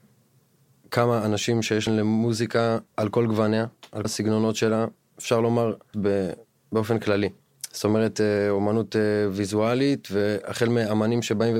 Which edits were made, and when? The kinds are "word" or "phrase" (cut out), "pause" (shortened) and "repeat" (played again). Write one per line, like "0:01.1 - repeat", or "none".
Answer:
0:01.9 - phrase
0:02.9 - pause
0:04.0 - word
0:05.9 - word